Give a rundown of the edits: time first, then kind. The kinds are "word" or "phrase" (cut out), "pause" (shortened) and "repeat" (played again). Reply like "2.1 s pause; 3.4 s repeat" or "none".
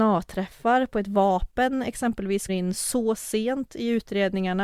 2.5 s word